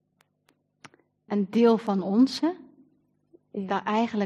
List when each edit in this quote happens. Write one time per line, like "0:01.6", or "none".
0:01.3

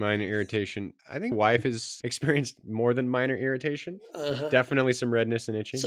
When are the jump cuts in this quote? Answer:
0:01.0
0:01.3
0:02.0

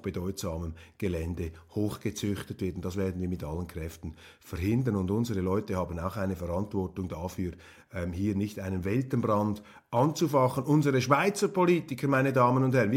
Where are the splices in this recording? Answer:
none

